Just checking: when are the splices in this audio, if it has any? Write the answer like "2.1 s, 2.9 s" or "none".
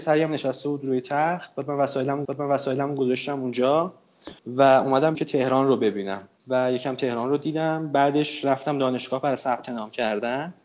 2.2 s, 4.4 s, 5.1 s, 6.4 s